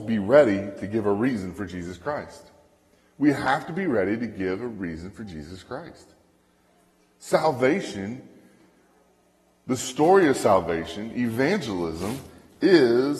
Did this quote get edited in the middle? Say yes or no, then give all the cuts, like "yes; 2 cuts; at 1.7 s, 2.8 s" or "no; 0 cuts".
no; 0 cuts